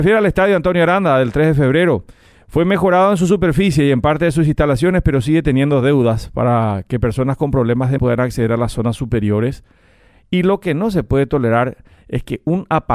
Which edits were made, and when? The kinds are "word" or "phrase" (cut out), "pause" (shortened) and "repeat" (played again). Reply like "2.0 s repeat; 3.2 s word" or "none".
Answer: 8.0 s word

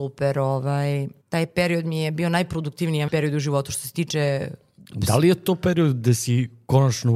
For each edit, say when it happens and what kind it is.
1.2 s pause; 3.1 s word

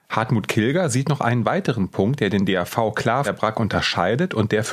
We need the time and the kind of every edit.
3.2 s word

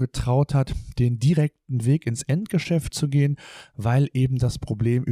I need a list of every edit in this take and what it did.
none

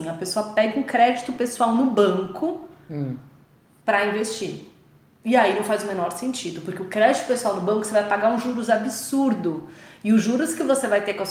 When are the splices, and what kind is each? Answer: none

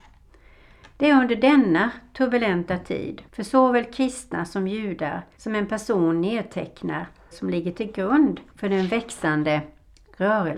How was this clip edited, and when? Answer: 3.3 s pause; 5.3 s pause; 7.3 s phrase; 8.5 s pause

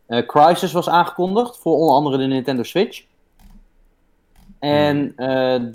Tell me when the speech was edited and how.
none

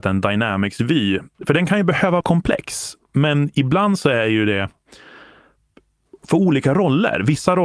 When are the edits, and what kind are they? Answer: 1.3 s pause; 2.2 s word; 3.0 s pause

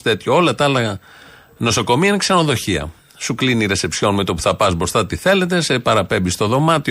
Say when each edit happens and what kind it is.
none

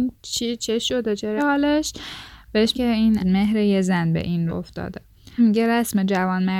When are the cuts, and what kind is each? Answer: 1.4 s word; 2.7 s word; 3.2 s word; 4.5 s word; 5.4 s word

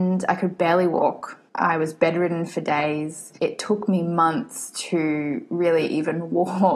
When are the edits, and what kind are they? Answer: 1.5 s pause; 3.4 s pause

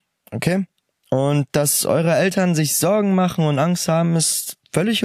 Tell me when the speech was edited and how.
none

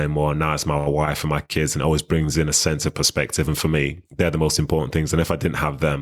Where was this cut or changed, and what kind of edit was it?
4.1 s pause

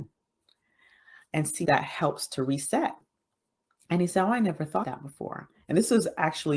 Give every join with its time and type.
1.6 s word; 4.8 s word

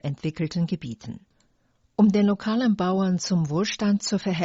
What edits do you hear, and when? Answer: none

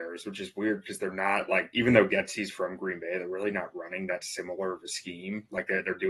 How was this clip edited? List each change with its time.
none

